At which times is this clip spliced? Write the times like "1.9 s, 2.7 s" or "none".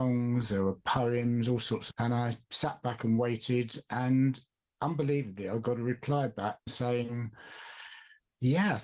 1.9 s, 6.7 s